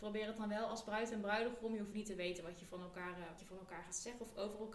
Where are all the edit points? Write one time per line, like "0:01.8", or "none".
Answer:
0:01.9
0:03.4